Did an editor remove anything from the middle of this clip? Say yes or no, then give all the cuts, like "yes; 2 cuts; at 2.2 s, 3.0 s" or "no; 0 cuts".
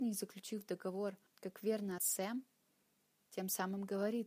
yes; 2 cuts; at 1.3 s, 2.0 s